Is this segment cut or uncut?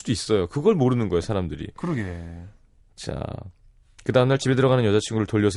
uncut